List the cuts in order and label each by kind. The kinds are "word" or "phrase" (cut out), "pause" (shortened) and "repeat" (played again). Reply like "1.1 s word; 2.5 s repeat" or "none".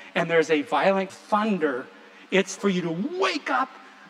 1.1 s phrase; 2.6 s word